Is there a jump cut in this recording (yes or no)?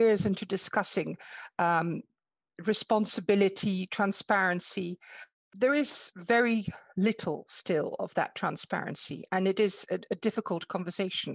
no